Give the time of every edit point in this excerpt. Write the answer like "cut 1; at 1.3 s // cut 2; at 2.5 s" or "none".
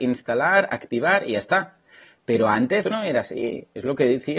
cut 1; at 2.8 s